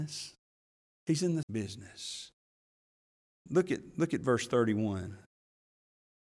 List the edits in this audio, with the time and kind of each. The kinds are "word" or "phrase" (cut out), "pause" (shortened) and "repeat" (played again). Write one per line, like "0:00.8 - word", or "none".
0:01.4 - word